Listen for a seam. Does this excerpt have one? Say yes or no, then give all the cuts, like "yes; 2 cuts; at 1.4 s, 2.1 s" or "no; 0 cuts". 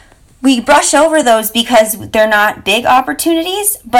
no; 0 cuts